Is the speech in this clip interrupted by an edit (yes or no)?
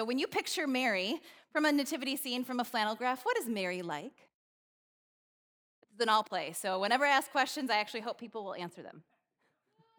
no